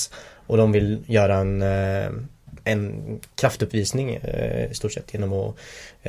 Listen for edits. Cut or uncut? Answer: uncut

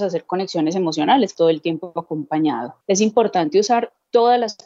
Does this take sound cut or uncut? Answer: cut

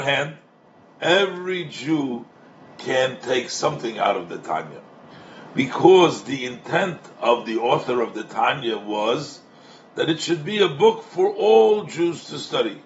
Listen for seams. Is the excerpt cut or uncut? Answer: uncut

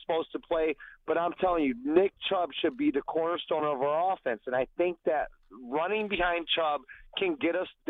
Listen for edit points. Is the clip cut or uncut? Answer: uncut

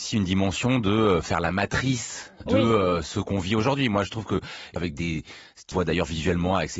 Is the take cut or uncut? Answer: cut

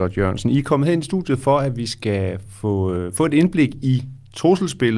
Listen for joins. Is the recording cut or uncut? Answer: uncut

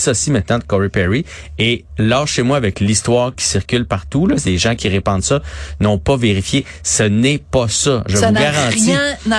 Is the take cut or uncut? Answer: cut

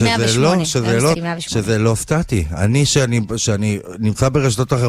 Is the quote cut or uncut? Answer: cut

